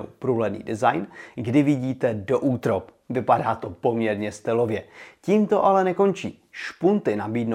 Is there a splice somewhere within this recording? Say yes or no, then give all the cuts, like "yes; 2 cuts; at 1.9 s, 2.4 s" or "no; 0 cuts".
no; 0 cuts